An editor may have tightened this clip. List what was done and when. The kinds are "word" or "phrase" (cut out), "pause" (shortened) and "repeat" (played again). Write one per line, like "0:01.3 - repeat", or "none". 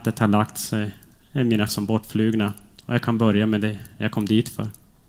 0:01.7 - word

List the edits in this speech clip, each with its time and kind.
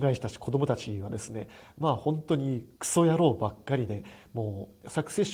0:02.7 - pause

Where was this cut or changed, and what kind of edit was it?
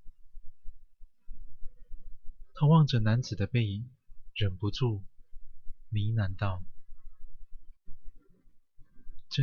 0:07.8 - pause

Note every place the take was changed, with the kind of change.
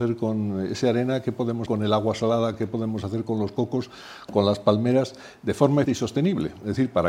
0:01.7 - word
0:05.8 - word

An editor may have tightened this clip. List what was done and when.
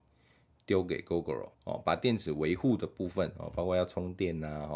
0:01.5 - pause

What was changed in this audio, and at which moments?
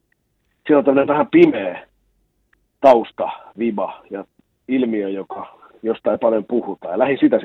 none

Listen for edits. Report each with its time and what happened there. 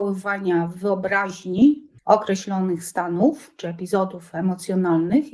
0:02.0 - pause

